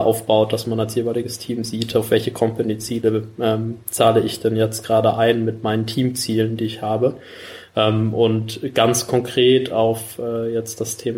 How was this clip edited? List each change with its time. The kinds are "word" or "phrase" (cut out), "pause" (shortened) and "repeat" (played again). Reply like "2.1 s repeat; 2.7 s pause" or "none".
none